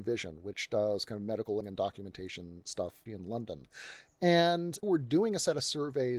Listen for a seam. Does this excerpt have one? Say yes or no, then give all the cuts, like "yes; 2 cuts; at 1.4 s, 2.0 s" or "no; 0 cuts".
yes; 3 cuts; at 1.6 s, 3.1 s, 4.8 s